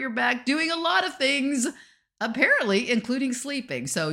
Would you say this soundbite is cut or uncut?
uncut